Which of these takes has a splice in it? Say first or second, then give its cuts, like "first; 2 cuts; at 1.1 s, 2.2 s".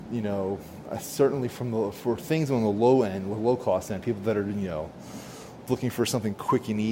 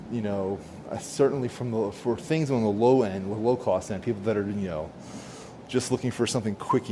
first; 1 cut; at 5.7 s